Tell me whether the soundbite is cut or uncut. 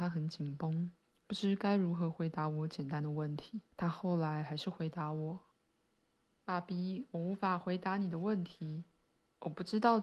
cut